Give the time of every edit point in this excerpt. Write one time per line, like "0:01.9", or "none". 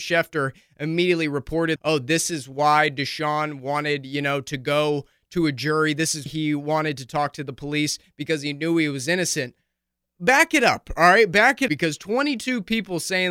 0:01.8
0:06.3
0:11.7